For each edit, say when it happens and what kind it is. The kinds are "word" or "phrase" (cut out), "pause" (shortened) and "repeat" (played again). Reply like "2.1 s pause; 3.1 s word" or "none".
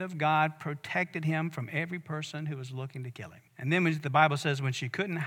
3.5 s pause